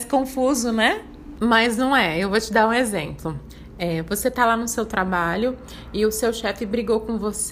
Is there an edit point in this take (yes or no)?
no